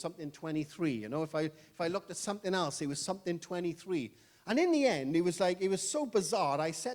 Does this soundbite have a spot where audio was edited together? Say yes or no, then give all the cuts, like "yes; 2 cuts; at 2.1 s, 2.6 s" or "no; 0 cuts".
no; 0 cuts